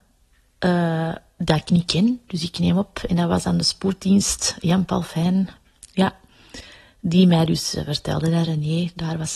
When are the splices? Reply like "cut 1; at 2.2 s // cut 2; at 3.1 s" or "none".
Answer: none